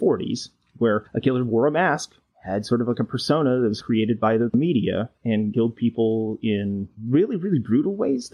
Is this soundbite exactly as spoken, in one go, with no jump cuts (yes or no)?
yes